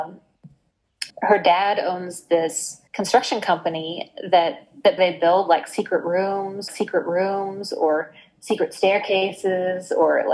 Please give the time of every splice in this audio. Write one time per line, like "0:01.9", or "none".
0:01.1
0:02.9
0:05.0
0:06.7